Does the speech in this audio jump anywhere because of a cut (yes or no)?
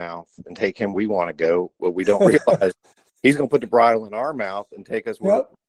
yes